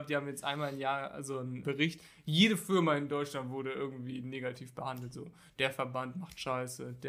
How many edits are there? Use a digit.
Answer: 1